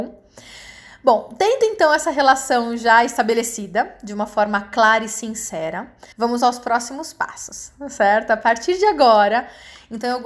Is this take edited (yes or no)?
yes